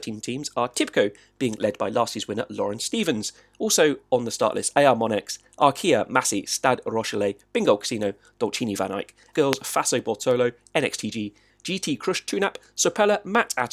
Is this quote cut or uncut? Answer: cut